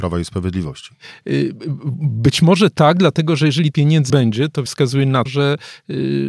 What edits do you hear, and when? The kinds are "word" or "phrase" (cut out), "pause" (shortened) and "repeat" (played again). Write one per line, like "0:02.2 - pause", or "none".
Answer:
0:03.7 - word
0:04.1 - word
0:04.7 - word
0:05.3 - word